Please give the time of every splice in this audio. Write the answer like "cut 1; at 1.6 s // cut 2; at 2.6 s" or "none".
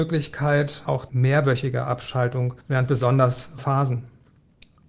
cut 1; at 1.1 s // cut 2; at 2.6 s // cut 3; at 3.6 s